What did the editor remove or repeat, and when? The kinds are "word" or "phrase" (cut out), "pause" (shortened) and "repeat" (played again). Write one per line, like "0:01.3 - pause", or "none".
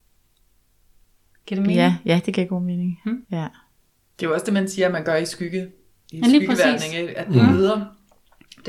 0:03.2 - pause